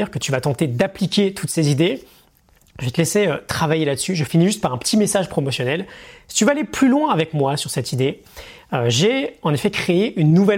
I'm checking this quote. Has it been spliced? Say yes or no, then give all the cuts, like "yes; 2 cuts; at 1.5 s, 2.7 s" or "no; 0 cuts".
no; 0 cuts